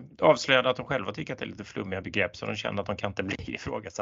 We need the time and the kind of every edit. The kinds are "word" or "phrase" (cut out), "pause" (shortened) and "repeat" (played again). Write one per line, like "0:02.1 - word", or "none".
none

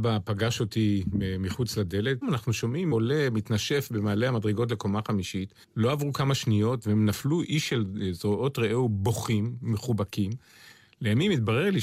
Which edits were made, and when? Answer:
0:02.2 - word
0:02.9 - word
0:05.6 - pause

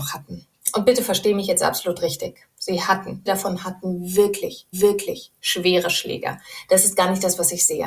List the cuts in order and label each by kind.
0:02.5 - pause
0:03.3 - word
0:04.7 - repeat

